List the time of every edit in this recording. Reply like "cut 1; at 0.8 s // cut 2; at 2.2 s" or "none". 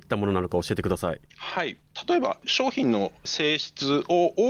cut 1; at 1.3 s